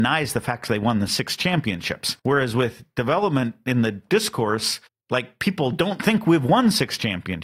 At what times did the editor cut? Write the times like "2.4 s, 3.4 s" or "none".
2.2 s, 4.1 s, 4.9 s